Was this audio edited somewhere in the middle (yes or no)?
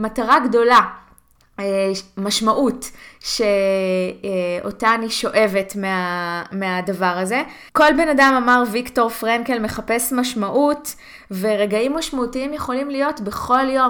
yes